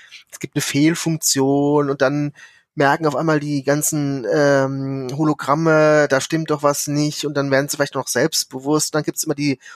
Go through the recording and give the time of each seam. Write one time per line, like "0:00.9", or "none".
none